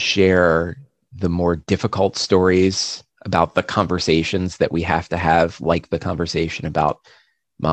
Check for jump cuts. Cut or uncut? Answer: uncut